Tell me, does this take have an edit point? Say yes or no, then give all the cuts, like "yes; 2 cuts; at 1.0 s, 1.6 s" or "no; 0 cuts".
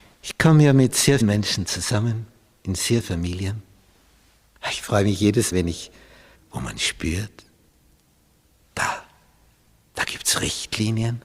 yes; 4 cuts; at 1.2 s, 3.0 s, 5.5 s, 6.3 s